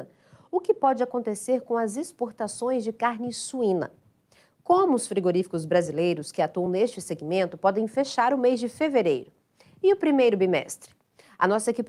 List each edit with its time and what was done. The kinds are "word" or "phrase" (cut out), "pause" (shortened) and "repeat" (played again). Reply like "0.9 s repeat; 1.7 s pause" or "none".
none